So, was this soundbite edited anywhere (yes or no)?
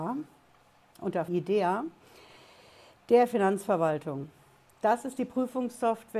yes